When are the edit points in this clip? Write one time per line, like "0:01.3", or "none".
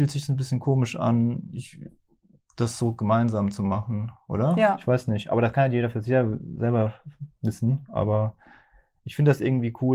none

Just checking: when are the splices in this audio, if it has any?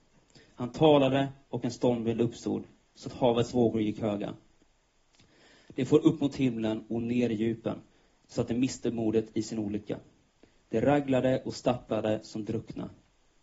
none

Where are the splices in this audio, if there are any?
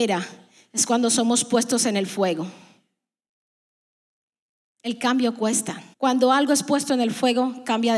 0:05.9

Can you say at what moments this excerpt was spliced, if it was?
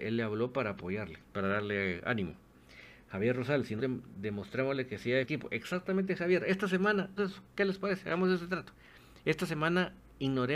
0:01.2
0:03.8
0:05.2
0:07.2

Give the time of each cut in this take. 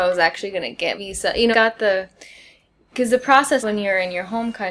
0:00.9
0:01.5
0:03.6

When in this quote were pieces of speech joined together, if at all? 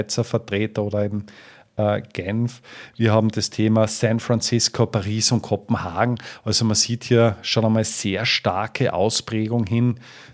none

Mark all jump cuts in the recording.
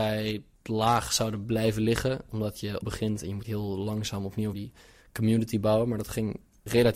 0:02.8
0:03.4
0:04.5

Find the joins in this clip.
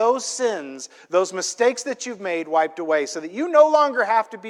none

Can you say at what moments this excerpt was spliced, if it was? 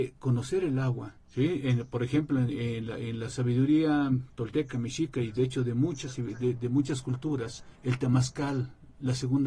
0:01.2
0:07.7

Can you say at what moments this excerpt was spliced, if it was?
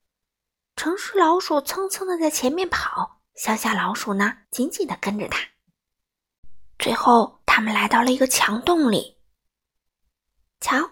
0:03.3
0:04.4
0:06.7
0:07.4

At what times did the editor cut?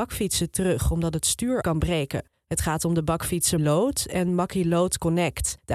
0:01.6
0:03.6

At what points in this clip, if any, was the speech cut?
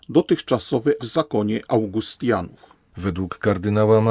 0:01.0

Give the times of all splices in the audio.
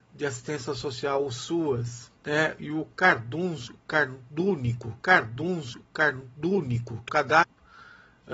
0:02.2
0:05.0
0:07.1

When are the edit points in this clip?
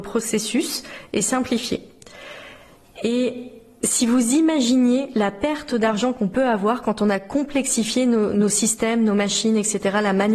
none

